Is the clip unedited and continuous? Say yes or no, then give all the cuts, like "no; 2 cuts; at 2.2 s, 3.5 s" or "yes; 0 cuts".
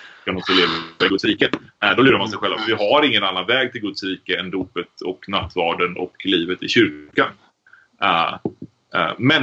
yes; 0 cuts